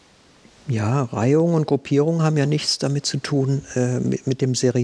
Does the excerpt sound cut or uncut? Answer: uncut